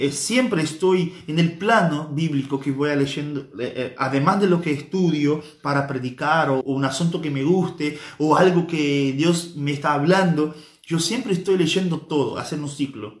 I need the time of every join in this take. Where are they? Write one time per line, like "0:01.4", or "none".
0:06.6